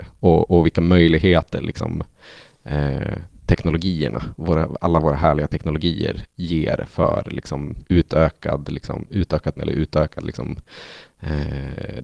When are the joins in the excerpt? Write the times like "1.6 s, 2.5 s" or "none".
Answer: 7.8 s, 9.6 s

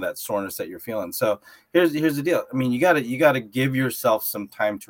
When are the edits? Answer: none

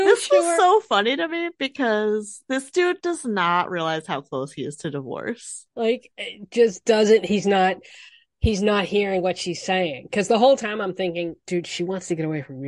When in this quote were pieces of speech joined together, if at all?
none

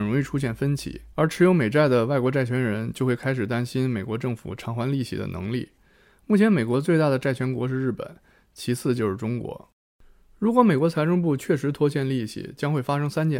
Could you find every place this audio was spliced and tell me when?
1.1 s

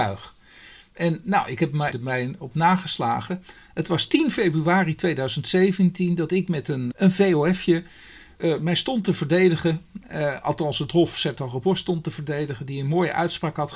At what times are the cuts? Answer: 1.9 s, 6.9 s, 8.4 s

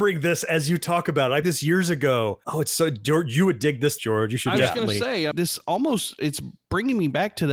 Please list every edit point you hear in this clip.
1.4 s, 2.4 s, 4.0 s, 5.3 s

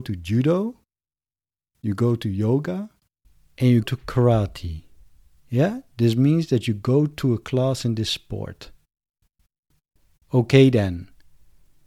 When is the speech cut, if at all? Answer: 3.8 s

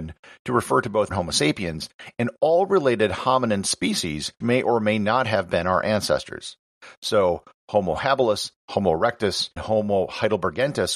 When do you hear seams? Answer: 1.1 s, 4.4 s, 9.6 s

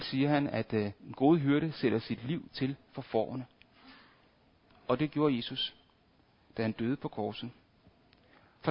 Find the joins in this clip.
1.0 s

